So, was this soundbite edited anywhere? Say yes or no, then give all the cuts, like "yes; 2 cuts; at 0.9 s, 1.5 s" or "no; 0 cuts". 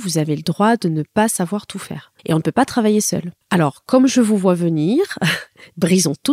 yes; 2 cuts; at 2.2 s, 3.4 s